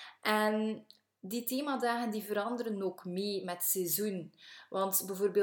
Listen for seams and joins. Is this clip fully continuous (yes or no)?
yes